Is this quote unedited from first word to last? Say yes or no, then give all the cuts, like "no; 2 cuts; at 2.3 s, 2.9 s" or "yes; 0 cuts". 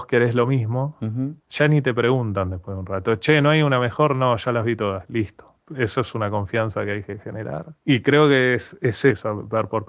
no; 2 cuts; at 1.4 s, 7.8 s